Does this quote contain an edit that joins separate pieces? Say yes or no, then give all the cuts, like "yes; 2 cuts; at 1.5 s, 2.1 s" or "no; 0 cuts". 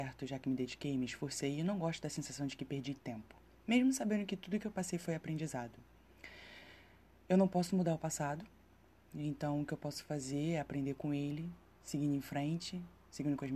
no; 0 cuts